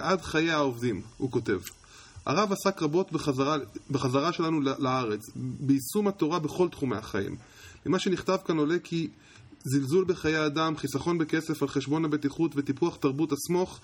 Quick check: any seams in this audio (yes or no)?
no